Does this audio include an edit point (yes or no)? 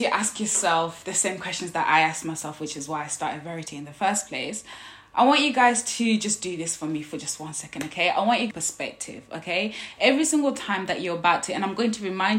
yes